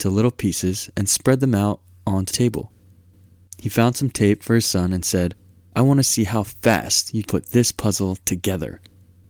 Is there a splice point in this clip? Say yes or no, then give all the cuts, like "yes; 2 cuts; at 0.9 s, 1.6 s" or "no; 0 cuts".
yes; 2 cuts; at 2.3 s, 7.2 s